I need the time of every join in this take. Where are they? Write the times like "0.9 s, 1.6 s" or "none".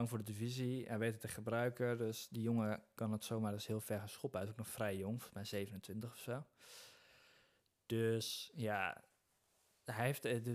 none

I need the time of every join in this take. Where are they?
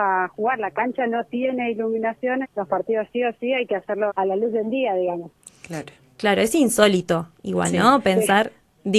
2.4 s, 4.1 s

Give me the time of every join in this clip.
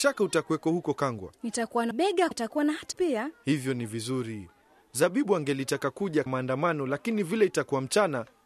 1.9 s, 2.3 s, 2.9 s, 6.3 s

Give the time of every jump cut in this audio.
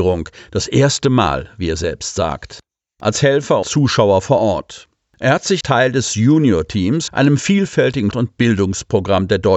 3.6 s, 5.6 s, 7.1 s, 8.1 s

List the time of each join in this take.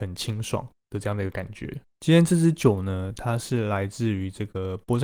1.9 s

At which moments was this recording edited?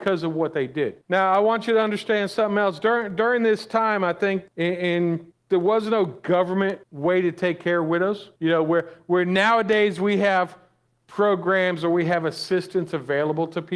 1.0 s, 4.5 s, 5.3 s, 6.8 s, 8.4 s

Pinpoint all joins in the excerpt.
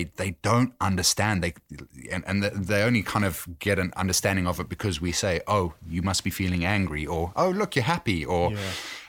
none

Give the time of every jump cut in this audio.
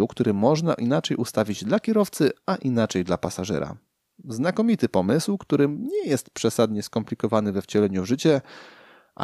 none

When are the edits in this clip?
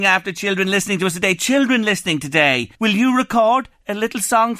2.7 s

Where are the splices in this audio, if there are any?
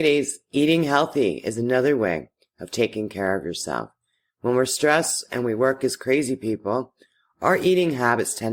none

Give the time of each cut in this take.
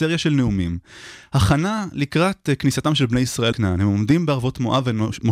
3.5 s

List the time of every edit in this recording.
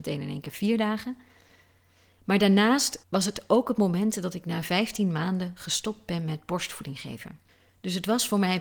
3.0 s

